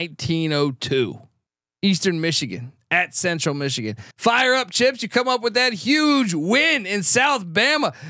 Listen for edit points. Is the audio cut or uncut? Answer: cut